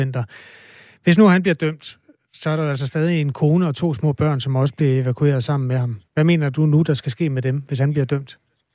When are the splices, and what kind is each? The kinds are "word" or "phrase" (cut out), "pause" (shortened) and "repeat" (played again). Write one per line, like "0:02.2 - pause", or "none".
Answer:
0:06.1 - pause